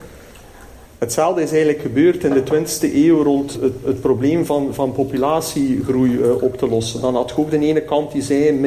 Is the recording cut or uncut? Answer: cut